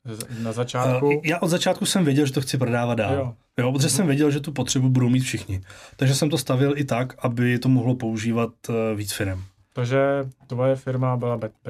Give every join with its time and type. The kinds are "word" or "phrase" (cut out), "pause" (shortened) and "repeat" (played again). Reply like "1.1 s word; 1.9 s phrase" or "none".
none